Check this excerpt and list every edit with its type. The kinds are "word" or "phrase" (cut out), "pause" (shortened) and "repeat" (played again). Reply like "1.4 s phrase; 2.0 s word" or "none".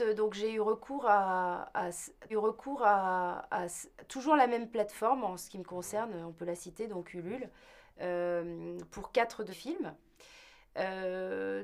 2.3 s repeat; 9.5 s word